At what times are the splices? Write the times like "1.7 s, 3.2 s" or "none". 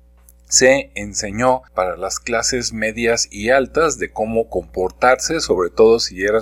1.7 s

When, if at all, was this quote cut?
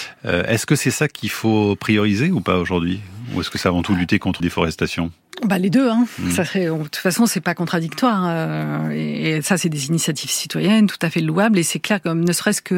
4.4 s

